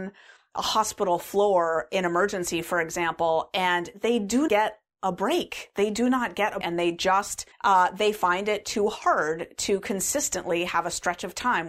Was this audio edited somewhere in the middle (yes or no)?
yes